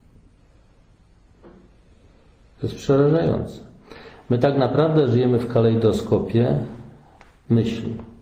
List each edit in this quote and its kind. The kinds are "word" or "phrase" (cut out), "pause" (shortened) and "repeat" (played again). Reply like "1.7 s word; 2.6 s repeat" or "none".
none